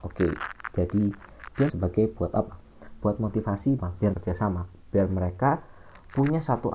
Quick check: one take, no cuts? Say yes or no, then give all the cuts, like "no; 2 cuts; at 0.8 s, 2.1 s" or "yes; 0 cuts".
no; 3 cuts; at 1.7 s, 3.8 s, 4.1 s